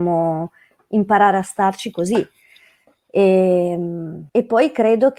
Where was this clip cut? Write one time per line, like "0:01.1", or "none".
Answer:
0:04.3

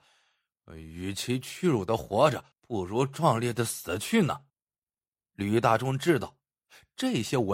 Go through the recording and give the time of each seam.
0:02.5
0:04.5

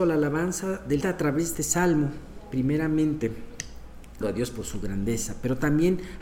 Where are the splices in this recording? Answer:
0:01.0
0:01.5
0:04.2

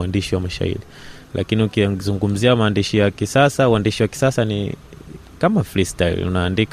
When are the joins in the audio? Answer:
0:01.2

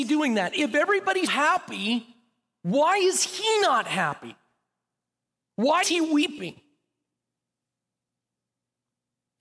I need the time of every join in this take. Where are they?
0:01.3
0:05.8

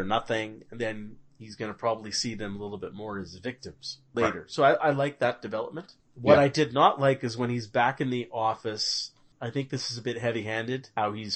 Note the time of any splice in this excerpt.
none

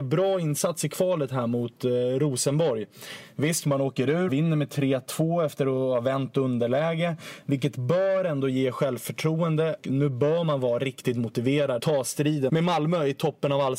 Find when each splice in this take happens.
0:04.3
0:09.8
0:11.8
0:12.5

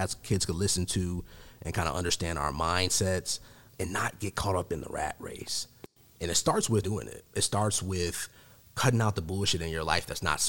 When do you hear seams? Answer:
0:03.7
0:06.8

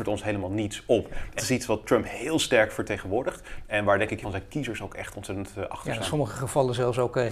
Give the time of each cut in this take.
0:01.4
0:04.2

